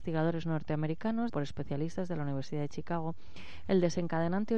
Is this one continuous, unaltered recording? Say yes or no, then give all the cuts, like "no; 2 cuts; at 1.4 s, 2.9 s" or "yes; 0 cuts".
no; 1 cut; at 1.3 s